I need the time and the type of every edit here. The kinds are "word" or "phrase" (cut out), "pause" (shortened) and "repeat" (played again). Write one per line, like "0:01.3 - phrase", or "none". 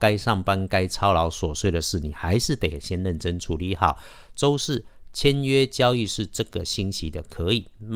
none